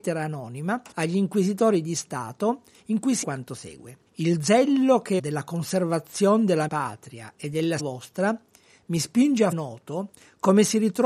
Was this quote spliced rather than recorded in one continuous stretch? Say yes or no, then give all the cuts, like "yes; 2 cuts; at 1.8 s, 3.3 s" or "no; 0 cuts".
yes; 7 cuts; at 0.9 s, 3.2 s, 4.1 s, 5.2 s, 6.7 s, 7.8 s, 9.5 s